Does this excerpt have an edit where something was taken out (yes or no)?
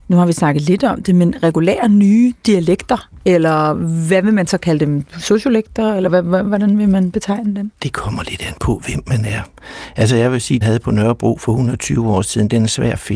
yes